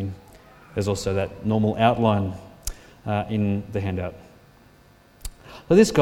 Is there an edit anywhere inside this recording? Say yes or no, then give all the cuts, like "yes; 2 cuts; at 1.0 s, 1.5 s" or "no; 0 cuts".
no; 0 cuts